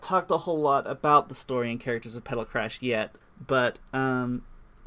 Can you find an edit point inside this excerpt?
yes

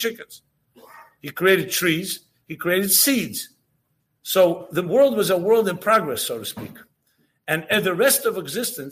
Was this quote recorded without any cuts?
yes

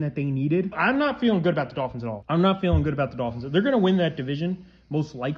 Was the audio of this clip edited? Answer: no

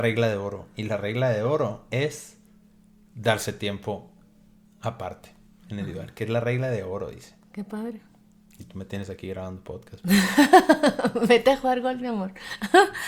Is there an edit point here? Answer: no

